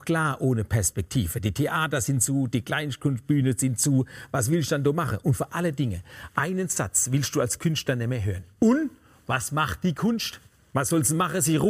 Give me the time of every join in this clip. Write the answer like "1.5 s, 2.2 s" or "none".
none